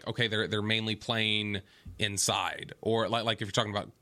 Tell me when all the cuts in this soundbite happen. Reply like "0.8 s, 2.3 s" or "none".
none

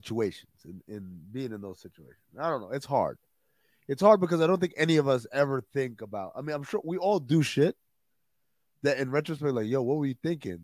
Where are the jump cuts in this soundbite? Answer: none

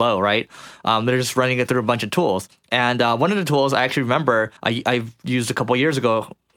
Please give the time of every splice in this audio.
4.6 s

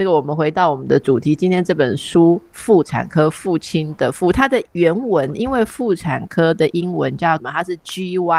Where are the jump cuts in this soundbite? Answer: 4.7 s, 7.4 s

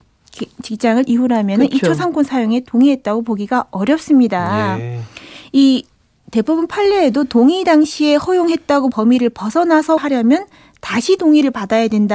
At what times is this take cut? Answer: 1.1 s, 8.9 s, 10.0 s

